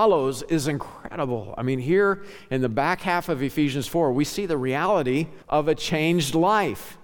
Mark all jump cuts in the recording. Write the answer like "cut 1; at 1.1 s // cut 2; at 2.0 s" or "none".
cut 1; at 5.4 s